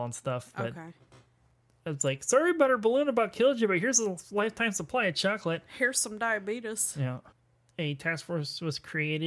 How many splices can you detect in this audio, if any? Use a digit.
0